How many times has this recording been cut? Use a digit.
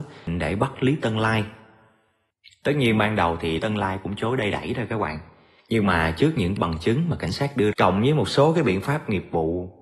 3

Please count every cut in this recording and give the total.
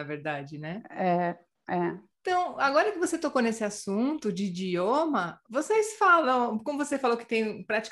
0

